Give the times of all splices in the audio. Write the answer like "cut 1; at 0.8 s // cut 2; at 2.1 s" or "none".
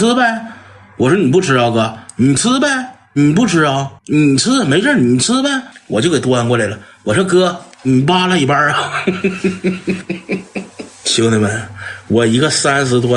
cut 1; at 4.0 s // cut 2; at 5.7 s

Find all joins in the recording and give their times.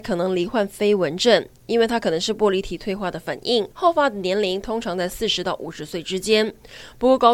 cut 1; at 3.7 s

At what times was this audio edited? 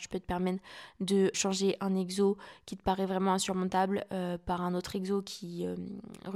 cut 1; at 1.3 s

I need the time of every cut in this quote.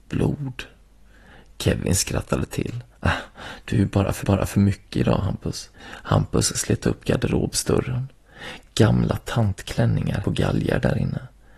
cut 1; at 2.9 s // cut 2; at 4.2 s // cut 3; at 5.7 s // cut 4; at 10.2 s

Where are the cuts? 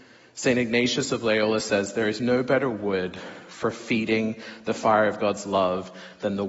none

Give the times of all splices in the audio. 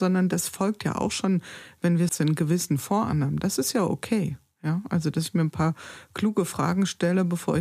cut 1; at 2.1 s

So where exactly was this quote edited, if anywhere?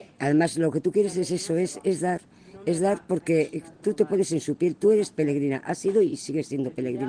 none

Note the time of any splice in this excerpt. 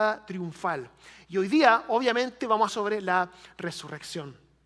cut 1; at 2.7 s

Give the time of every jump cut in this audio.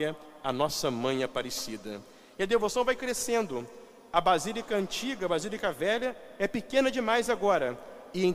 none

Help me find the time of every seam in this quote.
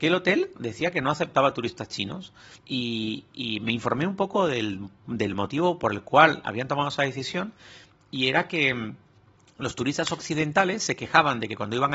cut 1; at 2.6 s

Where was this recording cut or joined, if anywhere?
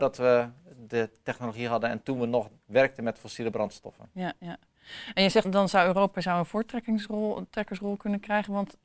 cut 1; at 5.4 s

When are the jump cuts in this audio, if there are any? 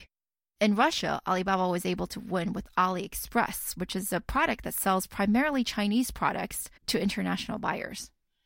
cut 1; at 6.8 s

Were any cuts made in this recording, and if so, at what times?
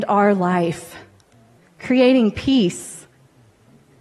cut 1; at 1.6 s

